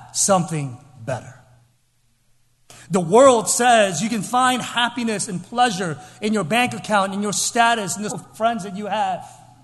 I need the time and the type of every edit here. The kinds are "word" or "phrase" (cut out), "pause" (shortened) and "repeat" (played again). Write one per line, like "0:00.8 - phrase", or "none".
0:08.1 - word